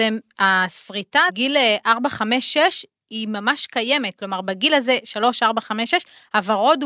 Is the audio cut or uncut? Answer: cut